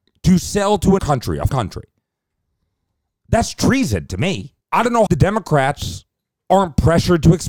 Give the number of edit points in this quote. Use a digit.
4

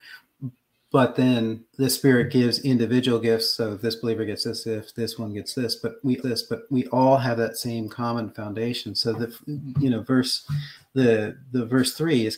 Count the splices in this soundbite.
2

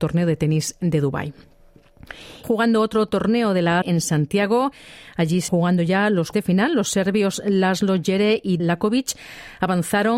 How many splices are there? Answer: 5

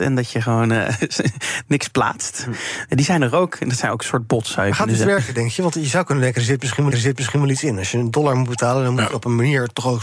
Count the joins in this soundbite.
1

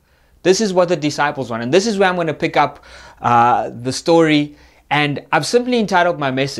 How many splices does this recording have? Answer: 0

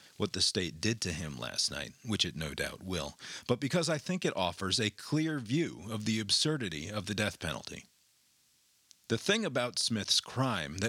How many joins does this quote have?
0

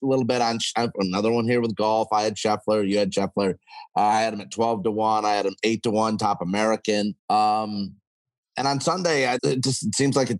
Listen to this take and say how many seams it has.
2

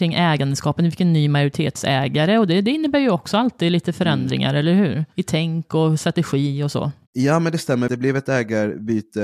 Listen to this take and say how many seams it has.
2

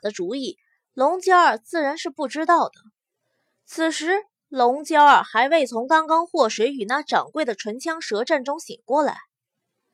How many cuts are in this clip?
0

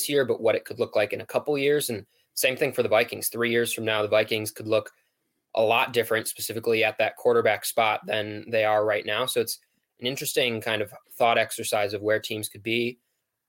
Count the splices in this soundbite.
0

